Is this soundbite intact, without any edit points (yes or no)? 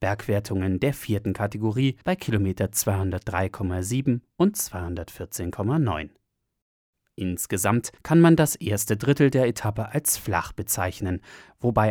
no